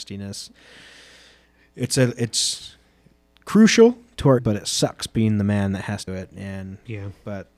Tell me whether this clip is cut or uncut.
cut